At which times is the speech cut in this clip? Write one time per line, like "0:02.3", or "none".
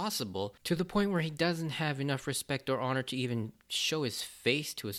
none